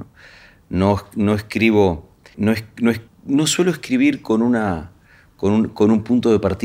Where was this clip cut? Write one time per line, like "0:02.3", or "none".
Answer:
0:02.3
0:03.1